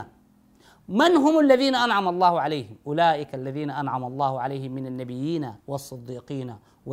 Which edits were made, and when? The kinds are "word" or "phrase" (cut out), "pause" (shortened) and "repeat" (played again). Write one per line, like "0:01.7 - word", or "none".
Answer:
0:05.6 - pause